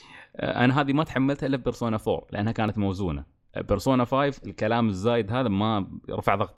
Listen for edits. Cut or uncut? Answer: uncut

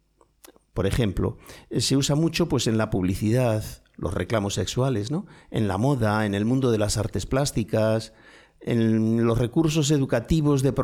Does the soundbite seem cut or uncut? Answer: uncut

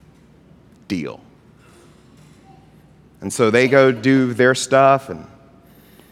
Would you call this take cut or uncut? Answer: uncut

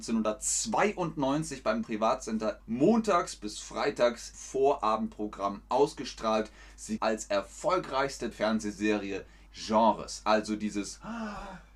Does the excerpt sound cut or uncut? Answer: cut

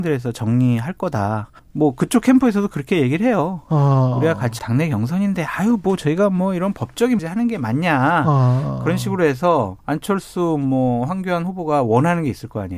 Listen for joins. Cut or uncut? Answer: cut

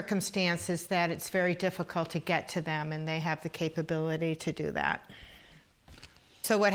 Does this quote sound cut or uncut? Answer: uncut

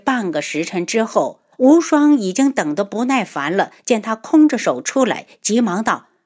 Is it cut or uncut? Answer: cut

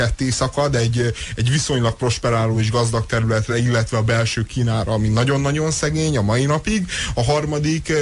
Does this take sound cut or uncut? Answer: uncut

